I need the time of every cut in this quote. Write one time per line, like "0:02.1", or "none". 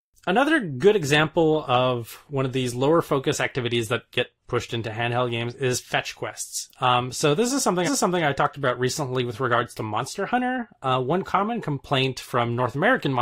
0:07.9

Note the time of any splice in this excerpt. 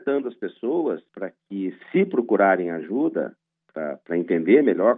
0:01.1

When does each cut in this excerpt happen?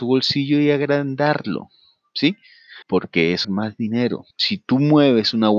0:02.8
0:03.4
0:04.3

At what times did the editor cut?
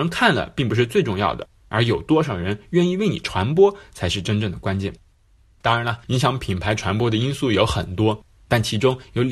none

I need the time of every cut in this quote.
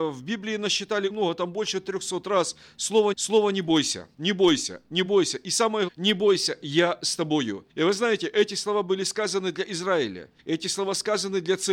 0:01.1
0:03.1
0:04.1
0:05.1
0:05.9
0:07.7
0:10.4

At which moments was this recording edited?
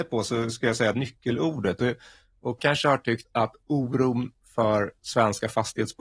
0:00.9
0:02.6
0:03.2

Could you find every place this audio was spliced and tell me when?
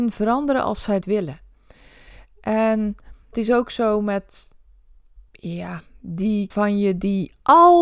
0:01.0
0:03.3
0:05.3
0:06.5

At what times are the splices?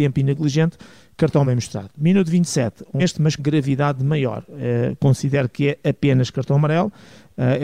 0:01.4
0:03.0
0:03.4

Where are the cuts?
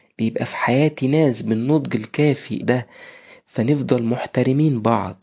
0:02.6

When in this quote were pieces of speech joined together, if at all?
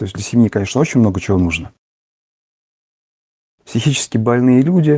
none

